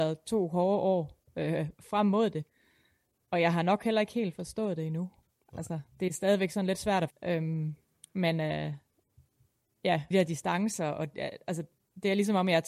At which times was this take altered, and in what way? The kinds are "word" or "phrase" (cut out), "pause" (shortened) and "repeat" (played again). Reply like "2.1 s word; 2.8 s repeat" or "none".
7.1 s word; 10.1 s phrase